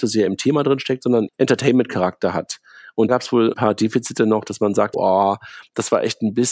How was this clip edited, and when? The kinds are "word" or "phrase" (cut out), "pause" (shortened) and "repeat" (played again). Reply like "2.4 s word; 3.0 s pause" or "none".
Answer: 1.3 s word; 3.1 s word; 3.5 s word; 4.9 s word